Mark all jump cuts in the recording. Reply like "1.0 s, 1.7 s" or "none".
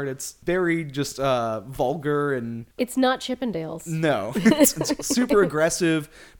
2.7 s